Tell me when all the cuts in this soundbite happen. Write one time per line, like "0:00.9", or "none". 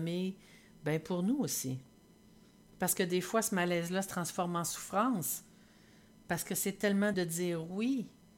0:07.1